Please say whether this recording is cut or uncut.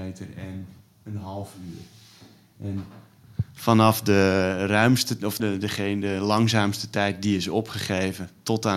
cut